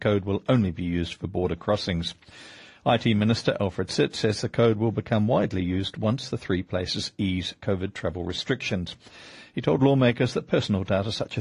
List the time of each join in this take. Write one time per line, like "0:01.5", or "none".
none